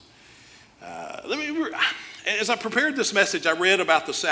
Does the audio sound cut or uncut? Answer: uncut